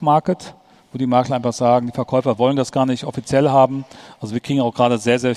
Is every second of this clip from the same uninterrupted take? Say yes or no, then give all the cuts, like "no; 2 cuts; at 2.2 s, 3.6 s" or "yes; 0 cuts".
yes; 0 cuts